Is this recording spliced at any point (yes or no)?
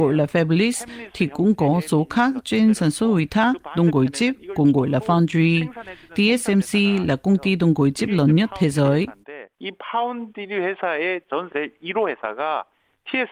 yes